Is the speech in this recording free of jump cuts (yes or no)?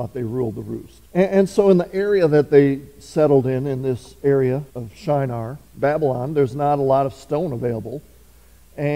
no